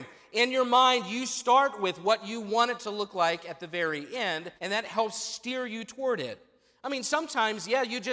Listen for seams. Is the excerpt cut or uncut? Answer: cut